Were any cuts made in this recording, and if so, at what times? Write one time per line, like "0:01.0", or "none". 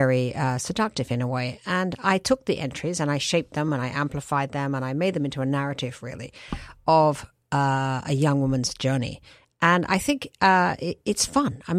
none